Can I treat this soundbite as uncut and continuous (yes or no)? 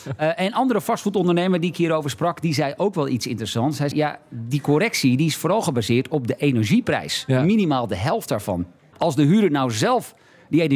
no